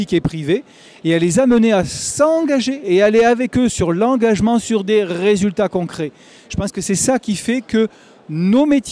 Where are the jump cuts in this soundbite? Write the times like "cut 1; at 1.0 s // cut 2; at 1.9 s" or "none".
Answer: none